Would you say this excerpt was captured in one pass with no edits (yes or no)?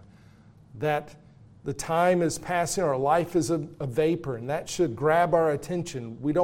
yes